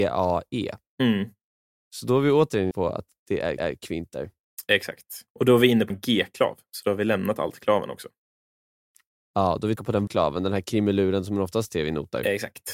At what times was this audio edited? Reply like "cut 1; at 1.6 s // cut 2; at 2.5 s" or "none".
cut 1; at 2.7 s // cut 2; at 3.6 s // cut 3; at 5.3 s // cut 4; at 5.9 s // cut 5; at 9.8 s // cut 6; at 10.1 s